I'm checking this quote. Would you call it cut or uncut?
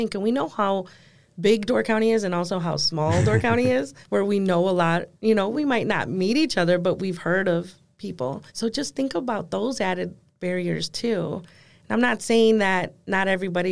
cut